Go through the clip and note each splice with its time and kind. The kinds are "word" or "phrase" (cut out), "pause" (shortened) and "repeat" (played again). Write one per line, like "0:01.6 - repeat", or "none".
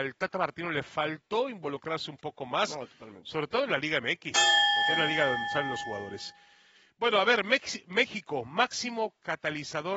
none